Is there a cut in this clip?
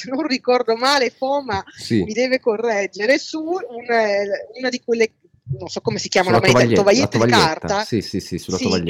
no; 0 cuts

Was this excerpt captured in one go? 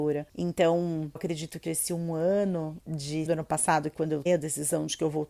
no; 5 cuts; at 1.2 s, 1.6 s, 3.3 s, 3.9 s, 4.3 s

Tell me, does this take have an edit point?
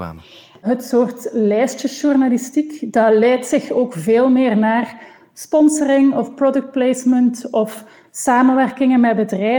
no; 0 cuts

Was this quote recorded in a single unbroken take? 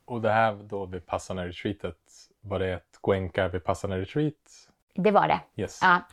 yes; 0 cuts

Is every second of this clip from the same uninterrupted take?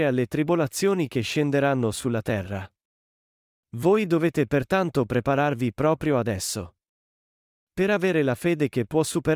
yes; 0 cuts

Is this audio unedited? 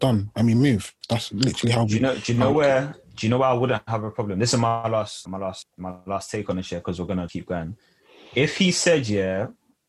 no; 3 cuts; at 5.2 s, 5.6 s, 7.3 s

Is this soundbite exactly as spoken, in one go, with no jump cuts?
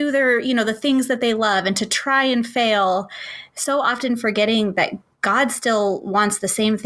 yes; 0 cuts

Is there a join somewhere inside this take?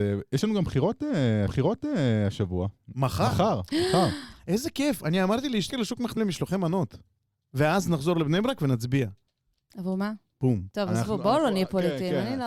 yes; 3 cuts; at 1.5 s, 5.7 s, 6.2 s

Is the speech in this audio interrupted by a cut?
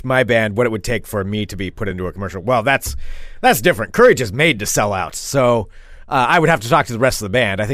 no; 0 cuts

